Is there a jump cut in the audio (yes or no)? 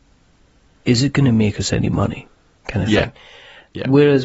no